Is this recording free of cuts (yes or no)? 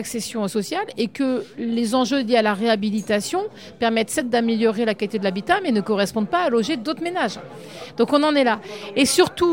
yes